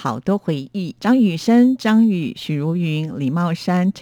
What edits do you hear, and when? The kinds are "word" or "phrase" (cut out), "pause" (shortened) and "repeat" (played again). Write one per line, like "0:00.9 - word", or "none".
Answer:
0:01.0 - pause